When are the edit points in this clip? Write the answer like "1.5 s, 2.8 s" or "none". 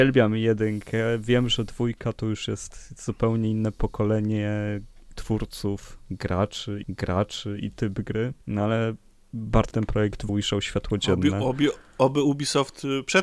6.8 s, 8.4 s, 9.7 s, 10.3 s